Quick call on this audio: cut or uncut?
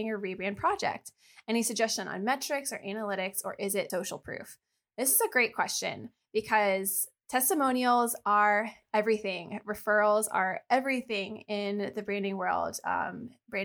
cut